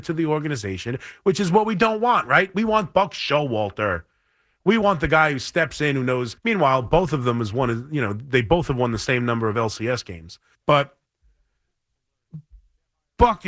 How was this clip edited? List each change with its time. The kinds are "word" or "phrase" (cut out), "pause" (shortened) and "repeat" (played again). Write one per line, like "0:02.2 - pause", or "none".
0:06.4 - pause
0:10.5 - pause